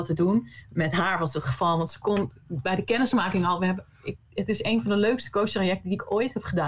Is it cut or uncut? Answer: uncut